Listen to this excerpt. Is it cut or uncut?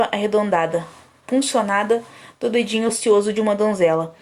uncut